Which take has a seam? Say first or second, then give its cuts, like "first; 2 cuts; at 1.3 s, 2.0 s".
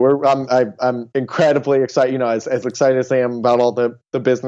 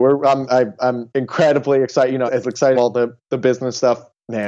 second; 2 cuts; at 2.3 s, 2.7 s